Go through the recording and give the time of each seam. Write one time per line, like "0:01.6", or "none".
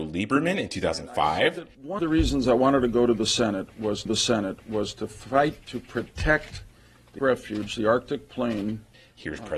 0:02.0
0:04.1
0:07.2

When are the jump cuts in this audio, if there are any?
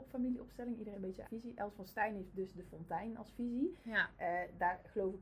0:00.9
0:01.2

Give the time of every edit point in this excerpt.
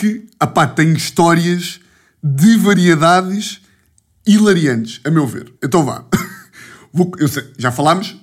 0:05.6

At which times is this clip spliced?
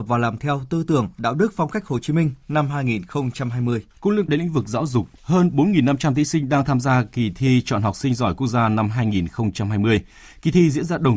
0:03.9
0:04.3
0:05.2

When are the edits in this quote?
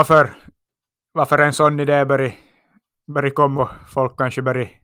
0:03.5

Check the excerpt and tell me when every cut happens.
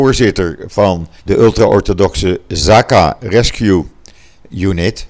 0:01.2

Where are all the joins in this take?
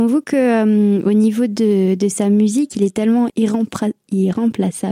0:03.3

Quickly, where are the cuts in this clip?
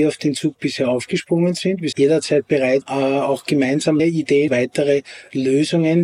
0:01.9
0:02.8
0:04.0
0:04.5

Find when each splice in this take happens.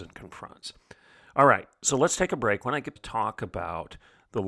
0:03.0

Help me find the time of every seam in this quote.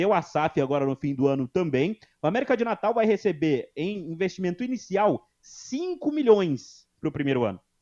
none

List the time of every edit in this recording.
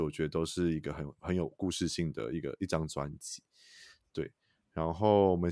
none

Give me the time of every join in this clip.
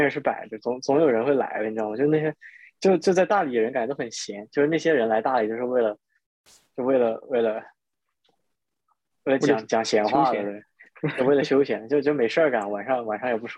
none

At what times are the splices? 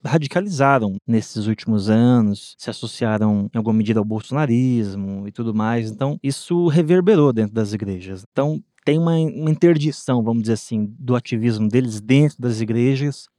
0:08.7

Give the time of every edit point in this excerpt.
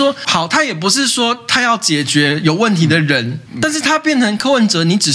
0:03.5

